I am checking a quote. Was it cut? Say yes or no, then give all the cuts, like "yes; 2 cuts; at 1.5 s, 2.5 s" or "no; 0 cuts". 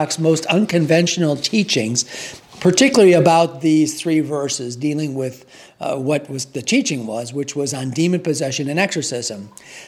no; 0 cuts